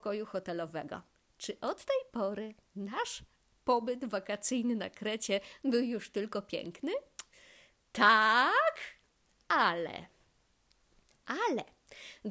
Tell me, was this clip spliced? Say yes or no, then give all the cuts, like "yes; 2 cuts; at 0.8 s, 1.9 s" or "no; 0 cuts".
no; 0 cuts